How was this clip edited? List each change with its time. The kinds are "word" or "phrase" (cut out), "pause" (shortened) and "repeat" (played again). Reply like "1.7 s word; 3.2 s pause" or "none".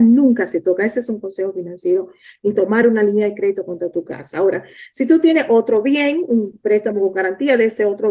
none

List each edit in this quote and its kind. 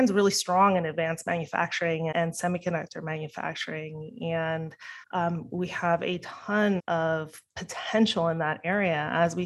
2.1 s word; 5.0 s pause; 6.8 s word

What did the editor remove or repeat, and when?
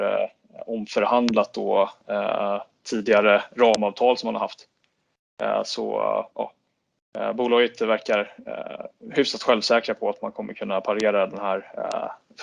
6.3 s pause

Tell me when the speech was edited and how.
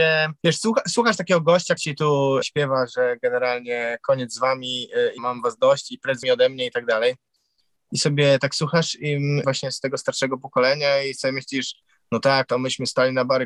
1.8 s word; 2.4 s word; 5.2 s word; 6.2 s word; 9.4 s word; 12.5 s word

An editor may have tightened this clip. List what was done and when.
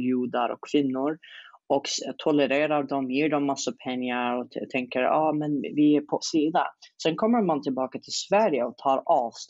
6.2 s word

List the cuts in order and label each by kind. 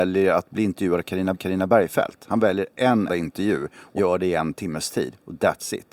1.3 s repeat; 3.1 s word; 4.0 s word

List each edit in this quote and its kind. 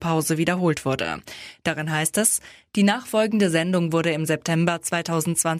none

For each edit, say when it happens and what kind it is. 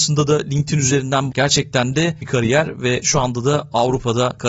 1.3 s phrase; 2.2 s word

